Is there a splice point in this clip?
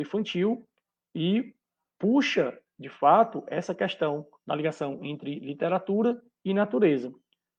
no; 0 cuts

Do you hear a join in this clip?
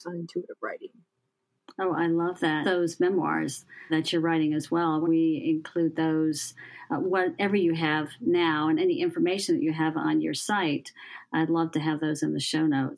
yes; 3 cuts; at 2.6 s, 3.9 s, 5.0 s

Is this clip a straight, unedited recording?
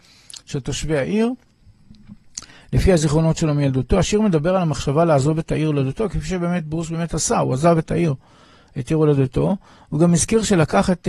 yes; 0 cuts

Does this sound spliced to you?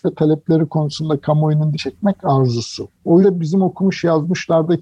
yes; 2 cuts; at 1.8 s, 3.2 s

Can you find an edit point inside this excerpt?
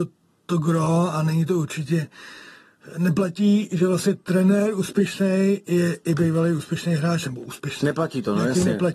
no; 0 cuts

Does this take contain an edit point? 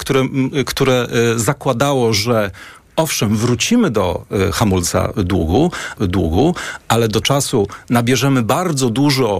yes; 2 cuts; at 6.0 s, 7.2 s

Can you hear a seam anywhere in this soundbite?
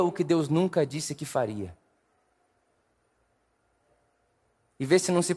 no; 0 cuts

